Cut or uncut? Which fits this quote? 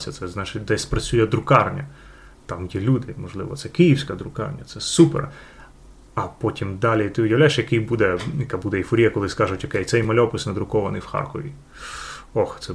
uncut